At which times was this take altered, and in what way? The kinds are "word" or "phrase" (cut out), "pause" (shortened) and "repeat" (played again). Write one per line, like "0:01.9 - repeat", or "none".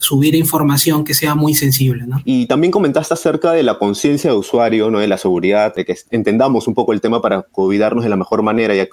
none